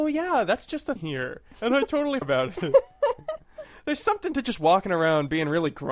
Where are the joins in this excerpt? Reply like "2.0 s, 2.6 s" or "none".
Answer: 1.0 s, 2.2 s